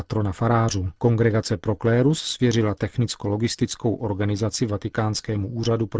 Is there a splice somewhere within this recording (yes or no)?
yes